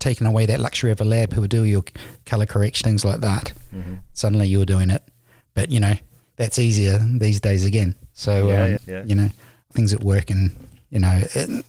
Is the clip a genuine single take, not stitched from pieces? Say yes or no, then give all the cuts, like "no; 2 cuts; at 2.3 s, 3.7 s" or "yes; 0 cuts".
no; 3 cuts; at 2.8 s, 8.8 s, 9.7 s